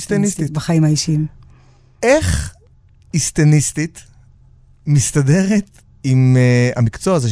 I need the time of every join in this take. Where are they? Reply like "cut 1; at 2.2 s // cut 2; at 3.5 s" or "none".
none